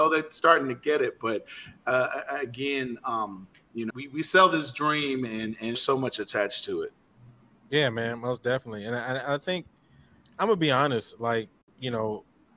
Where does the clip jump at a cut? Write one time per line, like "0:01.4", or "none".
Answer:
0:03.9
0:05.7